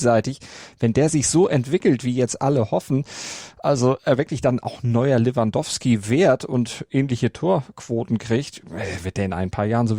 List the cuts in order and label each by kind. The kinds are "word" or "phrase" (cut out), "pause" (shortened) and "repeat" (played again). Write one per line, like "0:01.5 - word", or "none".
none